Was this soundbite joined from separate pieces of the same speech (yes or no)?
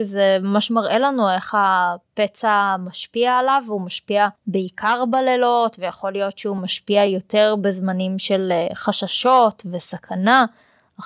no